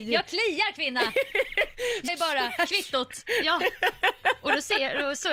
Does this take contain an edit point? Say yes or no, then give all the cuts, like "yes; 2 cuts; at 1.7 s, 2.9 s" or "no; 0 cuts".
yes; 1 cut; at 2.1 s